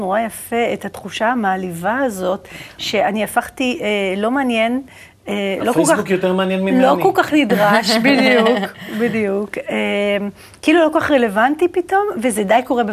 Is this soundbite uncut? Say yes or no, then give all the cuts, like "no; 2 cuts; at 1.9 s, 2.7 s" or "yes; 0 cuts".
yes; 0 cuts